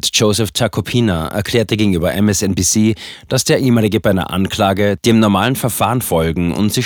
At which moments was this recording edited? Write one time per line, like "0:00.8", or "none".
0:04.0